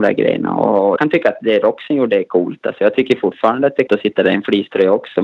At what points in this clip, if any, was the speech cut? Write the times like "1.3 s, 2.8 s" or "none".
1.0 s, 3.9 s